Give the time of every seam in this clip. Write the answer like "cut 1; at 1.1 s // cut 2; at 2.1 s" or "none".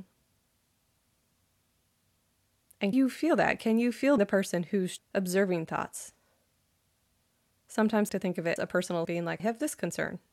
cut 1; at 2.9 s // cut 2; at 4.2 s // cut 3; at 5.0 s // cut 4; at 8.1 s // cut 5; at 8.6 s // cut 6; at 9.0 s // cut 7; at 9.4 s